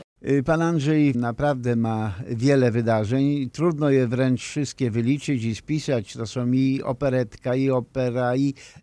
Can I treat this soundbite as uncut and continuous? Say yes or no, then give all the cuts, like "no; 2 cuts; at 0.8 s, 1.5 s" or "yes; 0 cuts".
no; 1 cut; at 1.1 s